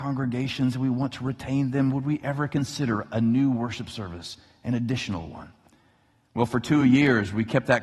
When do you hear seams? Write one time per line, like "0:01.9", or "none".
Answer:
none